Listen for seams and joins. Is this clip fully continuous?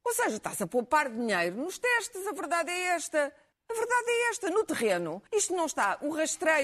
no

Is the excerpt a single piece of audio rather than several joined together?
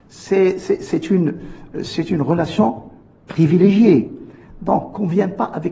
yes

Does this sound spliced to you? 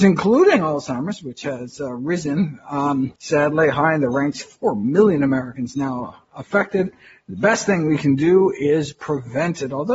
yes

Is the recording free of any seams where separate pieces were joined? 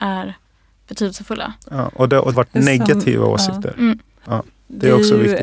no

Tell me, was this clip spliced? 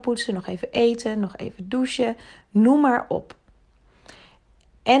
no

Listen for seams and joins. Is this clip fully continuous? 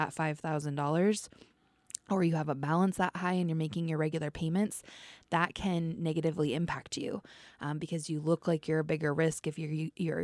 yes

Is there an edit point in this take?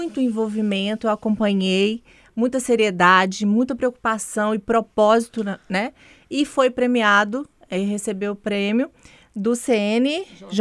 no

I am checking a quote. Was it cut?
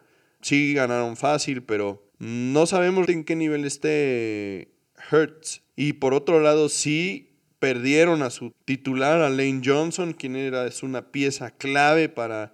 yes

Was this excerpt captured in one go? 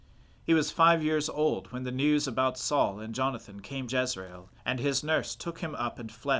no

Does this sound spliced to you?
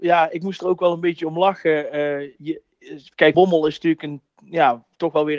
yes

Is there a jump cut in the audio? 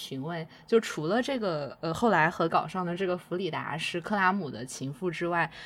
yes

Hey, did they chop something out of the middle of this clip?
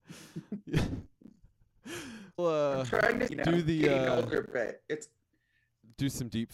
yes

